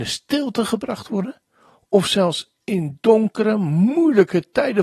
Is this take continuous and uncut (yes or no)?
yes